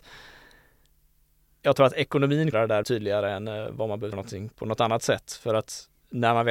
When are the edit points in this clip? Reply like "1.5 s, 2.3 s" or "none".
2.5 s, 2.8 s, 4.1 s